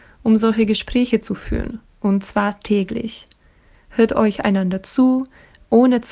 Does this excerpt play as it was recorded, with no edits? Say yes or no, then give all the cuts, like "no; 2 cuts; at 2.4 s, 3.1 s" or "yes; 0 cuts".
yes; 0 cuts